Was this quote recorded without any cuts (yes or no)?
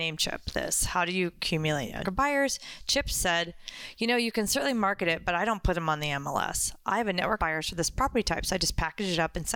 no